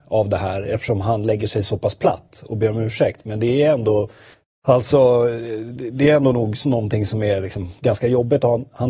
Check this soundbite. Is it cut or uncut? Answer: cut